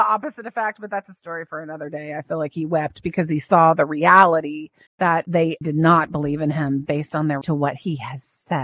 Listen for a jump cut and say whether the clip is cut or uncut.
cut